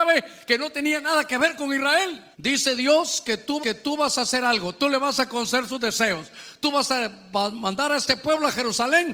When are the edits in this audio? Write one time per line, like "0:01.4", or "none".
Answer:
0:02.3
0:03.6